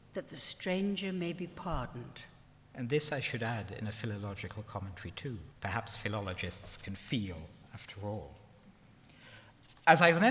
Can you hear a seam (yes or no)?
yes